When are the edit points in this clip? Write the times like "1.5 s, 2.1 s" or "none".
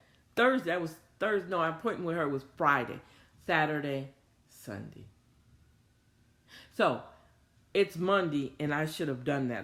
none